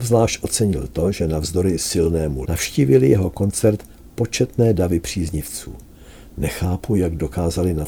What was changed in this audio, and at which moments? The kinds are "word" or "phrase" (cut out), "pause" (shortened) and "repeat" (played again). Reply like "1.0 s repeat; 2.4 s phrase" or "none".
2.5 s word

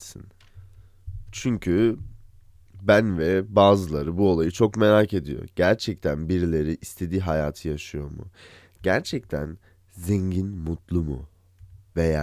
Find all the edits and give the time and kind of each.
none

